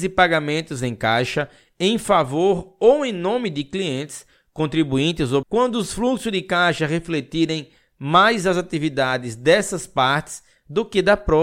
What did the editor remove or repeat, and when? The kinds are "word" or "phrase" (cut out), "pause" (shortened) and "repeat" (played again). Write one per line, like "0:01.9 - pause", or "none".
0:05.4 - word